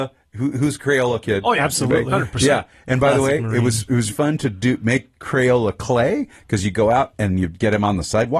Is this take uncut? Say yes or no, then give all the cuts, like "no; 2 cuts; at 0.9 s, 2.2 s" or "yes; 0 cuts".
no; 1 cut; at 4.1 s